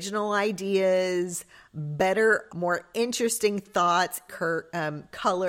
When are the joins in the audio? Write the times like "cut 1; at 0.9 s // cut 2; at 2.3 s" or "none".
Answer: cut 1; at 2.5 s // cut 2; at 4.3 s